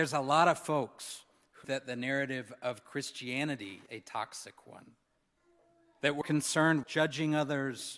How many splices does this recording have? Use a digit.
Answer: 4